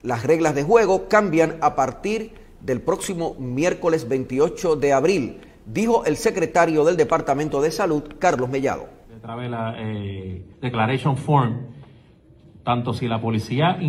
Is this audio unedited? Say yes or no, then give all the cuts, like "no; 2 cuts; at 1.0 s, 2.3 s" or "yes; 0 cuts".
no; 2 cuts; at 9.0 s, 10.5 s